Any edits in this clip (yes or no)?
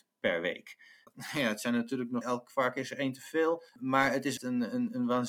yes